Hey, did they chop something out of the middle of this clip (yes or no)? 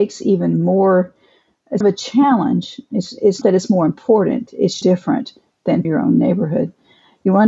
yes